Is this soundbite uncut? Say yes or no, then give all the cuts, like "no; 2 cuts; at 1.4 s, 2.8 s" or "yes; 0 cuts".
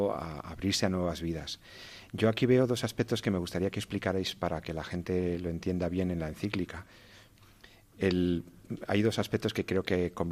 yes; 0 cuts